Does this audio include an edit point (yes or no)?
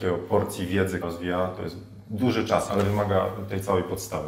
yes